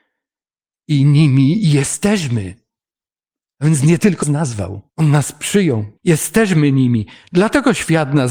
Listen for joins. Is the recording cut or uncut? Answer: cut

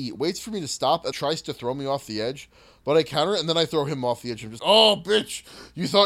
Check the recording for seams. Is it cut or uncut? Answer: cut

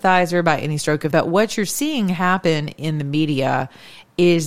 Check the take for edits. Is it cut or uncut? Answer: cut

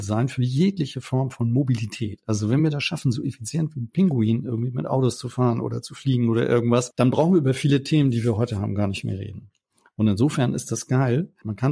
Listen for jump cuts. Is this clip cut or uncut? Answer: uncut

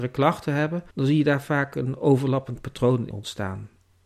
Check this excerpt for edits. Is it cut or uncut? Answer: cut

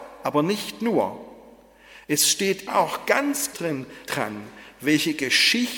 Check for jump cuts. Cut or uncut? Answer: cut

